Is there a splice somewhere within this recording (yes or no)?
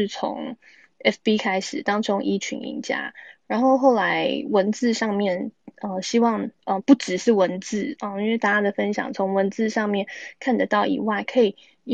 yes